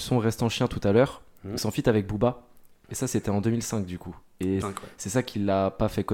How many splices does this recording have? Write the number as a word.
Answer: one